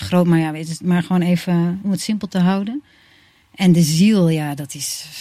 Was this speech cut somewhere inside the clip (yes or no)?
no